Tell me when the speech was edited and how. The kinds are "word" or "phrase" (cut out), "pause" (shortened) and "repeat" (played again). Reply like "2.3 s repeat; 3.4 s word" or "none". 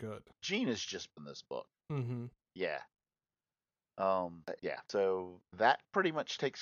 1.2 s word; 4.6 s word; 5.5 s word